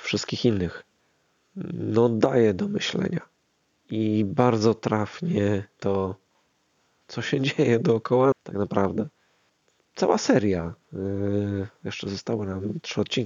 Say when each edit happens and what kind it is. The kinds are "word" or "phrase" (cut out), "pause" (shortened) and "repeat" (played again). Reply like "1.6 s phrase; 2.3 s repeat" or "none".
5.8 s word; 8.3 s word